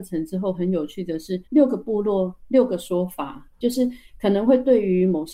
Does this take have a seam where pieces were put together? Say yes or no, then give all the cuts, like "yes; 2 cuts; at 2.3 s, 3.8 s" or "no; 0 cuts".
yes; 1 cut; at 1.5 s